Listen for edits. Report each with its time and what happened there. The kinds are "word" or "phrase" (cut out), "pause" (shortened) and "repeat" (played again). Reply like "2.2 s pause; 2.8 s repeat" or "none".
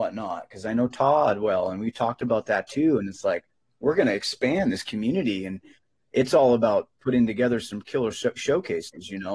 none